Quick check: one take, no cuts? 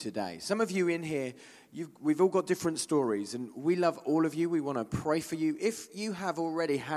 yes; 0 cuts

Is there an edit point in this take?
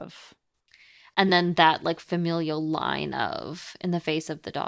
no; 0 cuts

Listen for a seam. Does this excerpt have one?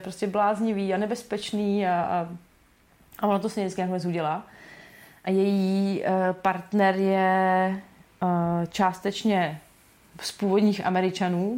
no; 0 cuts

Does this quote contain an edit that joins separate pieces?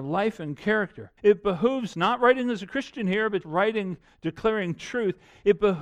yes; 3 cuts; at 1.2 s, 1.9 s, 3.4 s

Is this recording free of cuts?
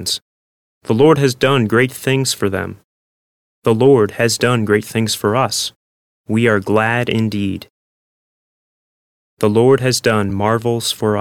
yes; 0 cuts

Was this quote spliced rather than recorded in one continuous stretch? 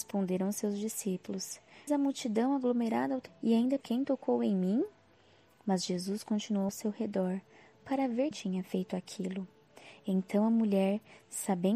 yes; 5 cuts; at 1.9 s, 3.3 s, 3.8 s, 6.7 s, 8.3 s

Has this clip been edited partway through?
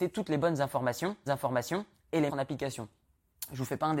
yes; 2 cuts; at 1.3 s, 2.3 s

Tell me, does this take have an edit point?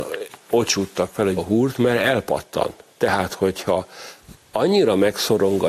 yes; 1 cut; at 1.4 s

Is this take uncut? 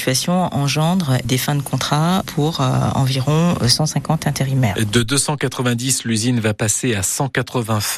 yes; 0 cuts

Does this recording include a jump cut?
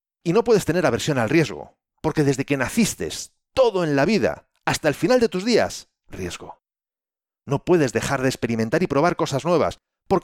yes; 1 cut; at 6.0 s

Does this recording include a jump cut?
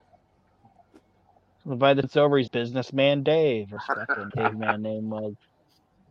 yes; 4 cuts; at 2.0 s, 2.5 s, 3.8 s, 4.3 s

